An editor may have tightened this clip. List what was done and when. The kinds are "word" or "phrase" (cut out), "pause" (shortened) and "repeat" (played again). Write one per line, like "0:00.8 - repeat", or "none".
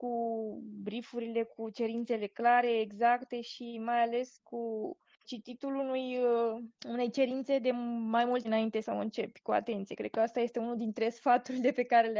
0:05.2 - word
0:06.8 - pause
0:08.4 - word
0:08.8 - phrase